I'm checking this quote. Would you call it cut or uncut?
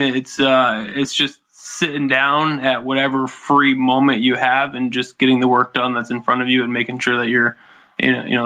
uncut